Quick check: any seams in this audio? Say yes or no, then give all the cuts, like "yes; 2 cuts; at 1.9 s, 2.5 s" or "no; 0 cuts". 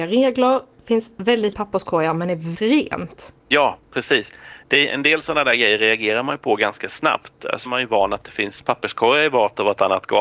yes; 5 cuts; at 1.5 s, 2.5 s, 3.4 s, 4.6 s, 7.6 s